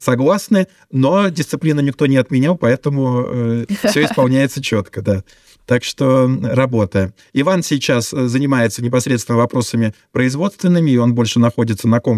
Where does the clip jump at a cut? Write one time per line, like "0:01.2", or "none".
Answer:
none